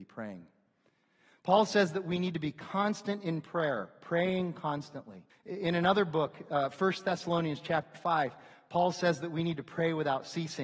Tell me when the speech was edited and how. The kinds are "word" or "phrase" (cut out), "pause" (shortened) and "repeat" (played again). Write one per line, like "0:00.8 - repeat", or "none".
0:05.3 - pause